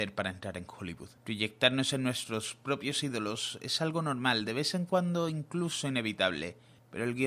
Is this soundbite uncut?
no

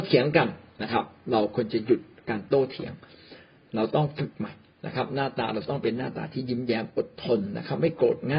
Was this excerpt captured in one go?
yes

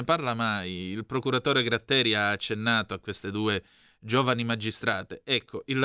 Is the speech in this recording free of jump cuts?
yes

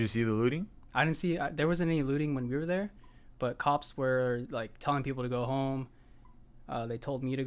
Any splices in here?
no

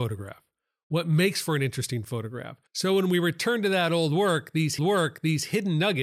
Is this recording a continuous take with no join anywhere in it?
no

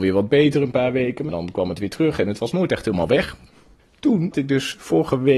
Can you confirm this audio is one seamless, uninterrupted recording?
no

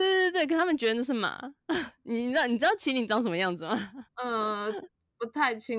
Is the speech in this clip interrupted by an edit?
yes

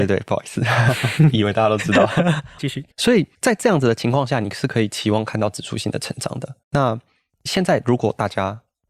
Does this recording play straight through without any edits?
no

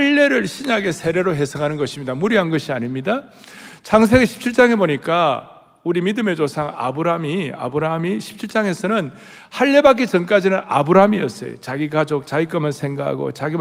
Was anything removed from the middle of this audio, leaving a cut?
no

